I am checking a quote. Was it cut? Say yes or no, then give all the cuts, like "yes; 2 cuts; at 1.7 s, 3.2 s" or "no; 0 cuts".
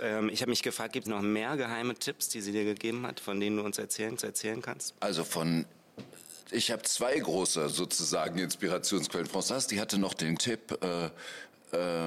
yes; 4 cuts; at 1.1 s, 4.2 s, 6.4 s, 10.4 s